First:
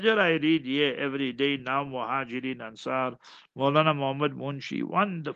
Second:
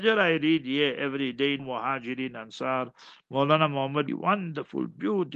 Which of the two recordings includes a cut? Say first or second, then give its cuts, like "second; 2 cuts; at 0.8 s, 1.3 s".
second; 2 cuts; at 1.6 s, 4.1 s